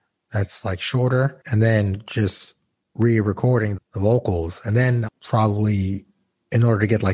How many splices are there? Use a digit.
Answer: 2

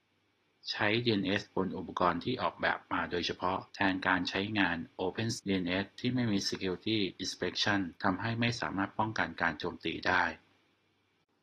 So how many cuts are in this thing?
3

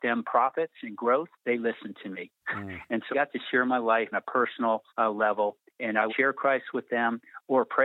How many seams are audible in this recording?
5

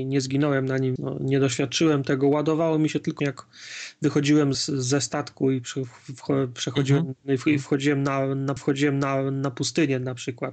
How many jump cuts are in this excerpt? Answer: 4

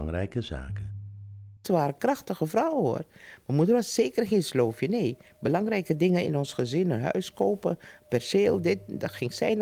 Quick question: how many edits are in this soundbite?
1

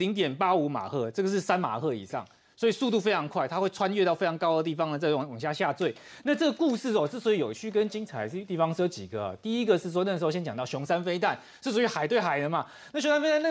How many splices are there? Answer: 0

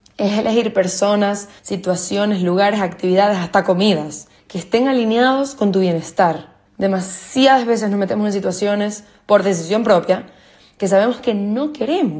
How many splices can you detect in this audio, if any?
3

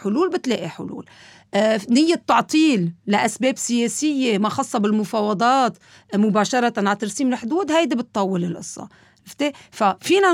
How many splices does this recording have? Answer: 0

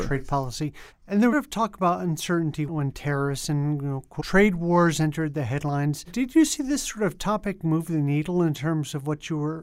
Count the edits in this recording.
3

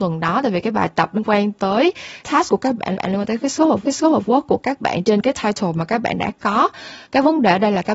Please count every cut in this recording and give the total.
5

